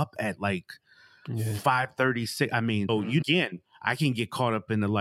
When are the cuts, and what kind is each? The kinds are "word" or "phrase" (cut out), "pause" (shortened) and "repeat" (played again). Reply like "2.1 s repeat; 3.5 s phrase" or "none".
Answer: 2.9 s word; 3.2 s word